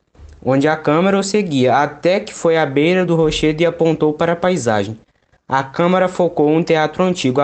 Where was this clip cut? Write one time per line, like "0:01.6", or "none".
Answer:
none